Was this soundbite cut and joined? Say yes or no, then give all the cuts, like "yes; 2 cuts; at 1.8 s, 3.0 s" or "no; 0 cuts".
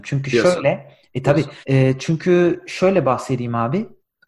yes; 1 cut; at 1.6 s